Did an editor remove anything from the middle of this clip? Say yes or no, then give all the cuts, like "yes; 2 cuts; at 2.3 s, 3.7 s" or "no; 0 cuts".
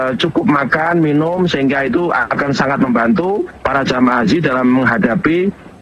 no; 0 cuts